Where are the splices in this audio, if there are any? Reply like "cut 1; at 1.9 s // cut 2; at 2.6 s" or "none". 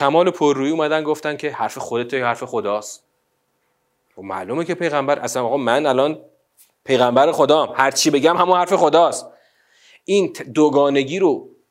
none